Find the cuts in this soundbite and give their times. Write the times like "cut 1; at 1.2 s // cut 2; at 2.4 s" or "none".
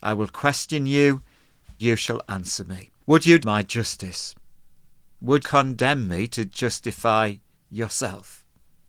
cut 1; at 1.8 s // cut 2; at 3.0 s // cut 3; at 3.4 s // cut 4; at 5.4 s